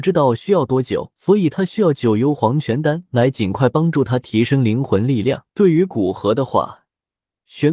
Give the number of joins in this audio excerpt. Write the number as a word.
two